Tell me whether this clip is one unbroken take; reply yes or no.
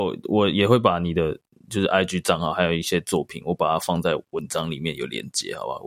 yes